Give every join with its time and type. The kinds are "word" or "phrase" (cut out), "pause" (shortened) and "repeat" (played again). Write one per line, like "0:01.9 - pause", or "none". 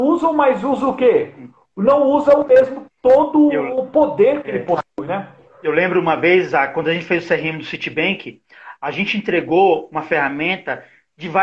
none